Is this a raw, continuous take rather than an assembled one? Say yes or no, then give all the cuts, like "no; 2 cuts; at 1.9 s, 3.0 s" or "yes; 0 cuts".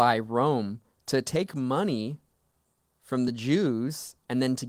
yes; 0 cuts